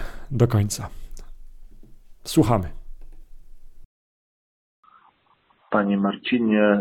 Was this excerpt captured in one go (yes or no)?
no